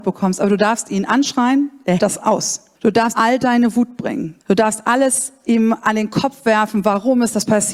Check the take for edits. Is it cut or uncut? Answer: cut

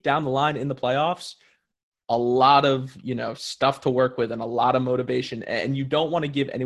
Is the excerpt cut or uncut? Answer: uncut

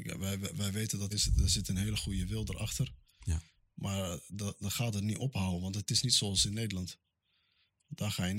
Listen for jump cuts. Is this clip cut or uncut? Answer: cut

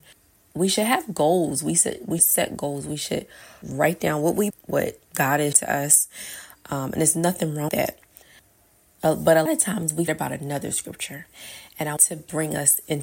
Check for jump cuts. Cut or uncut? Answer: cut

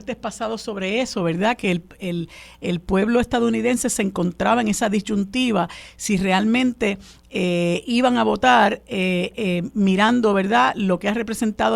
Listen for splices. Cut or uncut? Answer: uncut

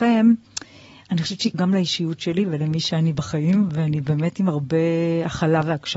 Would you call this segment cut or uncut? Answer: cut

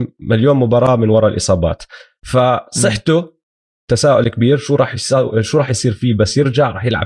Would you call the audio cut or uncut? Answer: uncut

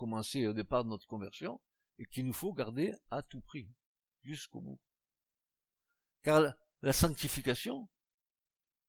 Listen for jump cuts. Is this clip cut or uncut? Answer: uncut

